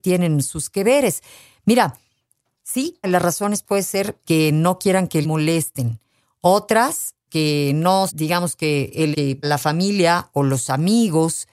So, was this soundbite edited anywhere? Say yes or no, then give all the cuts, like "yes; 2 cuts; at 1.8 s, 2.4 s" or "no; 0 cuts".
yes; 7 cuts; at 3.0 s, 4.2 s, 5.2 s, 7.3 s, 8.1 s, 9.1 s, 9.4 s